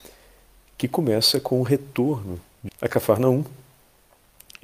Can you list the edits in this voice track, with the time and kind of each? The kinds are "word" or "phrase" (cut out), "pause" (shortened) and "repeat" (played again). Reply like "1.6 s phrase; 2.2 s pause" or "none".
2.7 s word